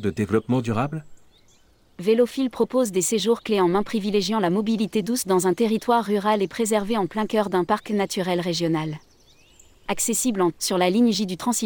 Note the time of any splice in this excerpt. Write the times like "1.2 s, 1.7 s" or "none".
10.5 s